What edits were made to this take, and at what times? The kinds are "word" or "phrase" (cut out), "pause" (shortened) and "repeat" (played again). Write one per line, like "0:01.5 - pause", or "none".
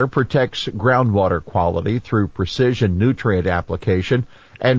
none